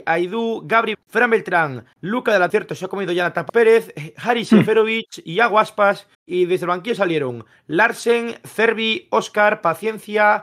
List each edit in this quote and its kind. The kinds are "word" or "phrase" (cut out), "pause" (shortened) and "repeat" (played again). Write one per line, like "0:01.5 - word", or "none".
0:00.9 - word
0:01.9 - pause
0:02.5 - phrase
0:03.5 - phrase
0:06.1 - pause